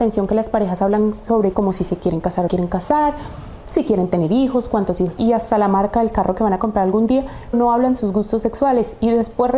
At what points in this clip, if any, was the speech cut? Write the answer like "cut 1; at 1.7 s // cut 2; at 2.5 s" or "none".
cut 1; at 1.5 s // cut 2; at 2.5 s // cut 3; at 5.2 s // cut 4; at 7.5 s // cut 5; at 8.0 s